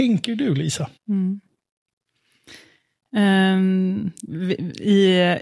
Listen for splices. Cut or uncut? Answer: cut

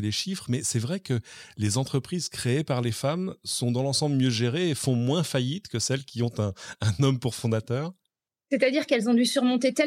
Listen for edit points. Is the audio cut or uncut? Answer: uncut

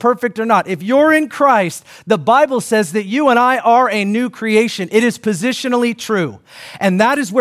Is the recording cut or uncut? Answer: uncut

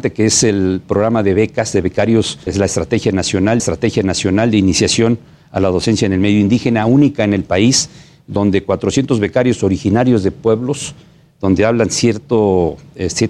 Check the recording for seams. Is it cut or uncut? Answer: cut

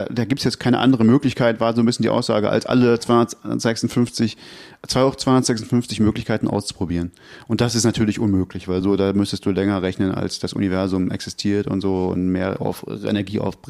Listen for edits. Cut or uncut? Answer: uncut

